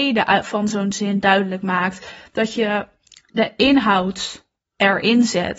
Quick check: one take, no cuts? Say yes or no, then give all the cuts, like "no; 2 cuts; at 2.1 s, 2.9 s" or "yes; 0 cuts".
yes; 0 cuts